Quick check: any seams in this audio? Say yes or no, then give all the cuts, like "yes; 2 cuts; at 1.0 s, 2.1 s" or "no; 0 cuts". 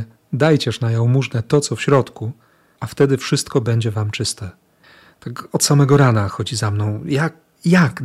no; 0 cuts